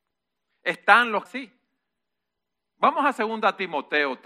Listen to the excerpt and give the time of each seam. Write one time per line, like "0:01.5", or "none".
0:01.3